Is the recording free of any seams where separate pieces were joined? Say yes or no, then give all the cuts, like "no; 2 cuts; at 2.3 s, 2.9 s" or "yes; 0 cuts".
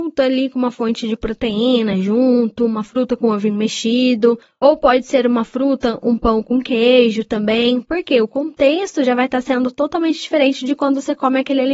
yes; 0 cuts